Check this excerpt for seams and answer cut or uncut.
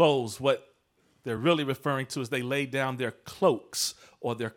uncut